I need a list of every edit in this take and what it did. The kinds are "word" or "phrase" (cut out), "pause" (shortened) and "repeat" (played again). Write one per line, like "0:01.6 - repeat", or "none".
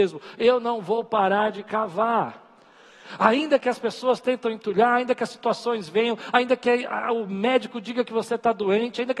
none